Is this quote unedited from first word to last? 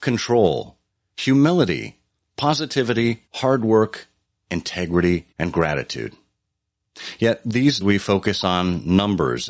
no; 4 cuts; at 2.2 s, 3.3 s, 5.3 s, 7.8 s

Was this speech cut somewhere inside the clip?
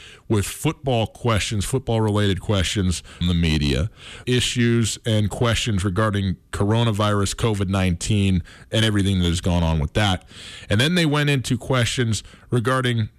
yes; 2 cuts; at 3.2 s, 4.2 s

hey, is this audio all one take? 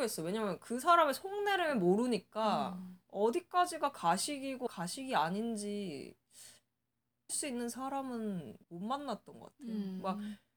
no; 3 cuts; at 4.7 s, 7.3 s, 8.6 s

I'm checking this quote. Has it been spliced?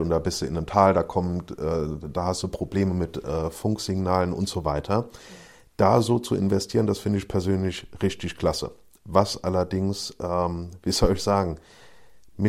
no; 0 cuts

